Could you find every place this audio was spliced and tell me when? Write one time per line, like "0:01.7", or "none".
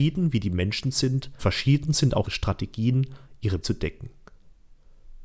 0:01.4
0:02.2
0:03.6